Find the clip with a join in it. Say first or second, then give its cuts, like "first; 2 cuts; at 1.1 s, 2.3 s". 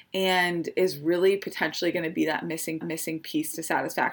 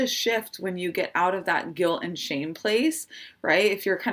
first; 1 cut; at 2.8 s